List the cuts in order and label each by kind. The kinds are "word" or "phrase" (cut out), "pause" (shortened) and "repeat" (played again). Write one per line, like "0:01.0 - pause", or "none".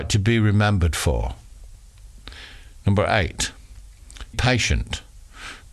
0:04.3 - word

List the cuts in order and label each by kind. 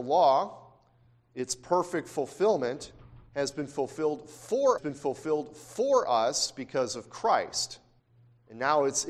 0:03.3 - pause
0:04.8 - repeat
0:08.0 - pause

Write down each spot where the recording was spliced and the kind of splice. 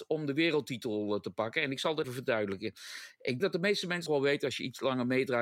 0:02.0 - word
0:03.4 - word
0:04.1 - word

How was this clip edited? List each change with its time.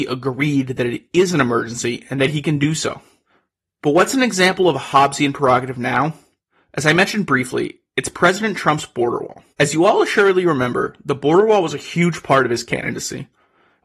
0:09.5 - pause

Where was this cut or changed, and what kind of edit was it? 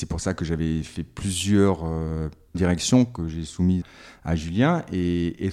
0:02.5 - word
0:03.8 - word

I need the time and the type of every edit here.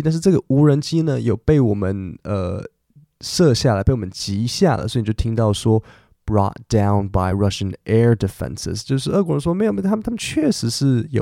none

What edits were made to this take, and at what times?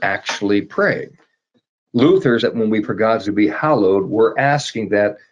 0:02.4 - word
0:02.8 - word
0:03.3 - word

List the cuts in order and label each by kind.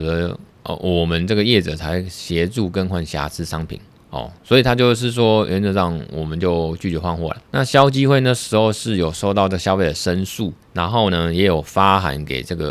0:07.5 - pause
0:10.6 - pause

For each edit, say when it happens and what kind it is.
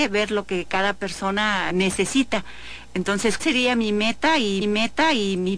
0:01.7 - word
0:03.4 - word
0:04.6 - repeat

